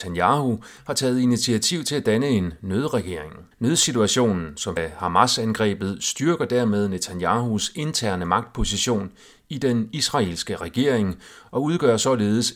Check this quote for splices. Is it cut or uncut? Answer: cut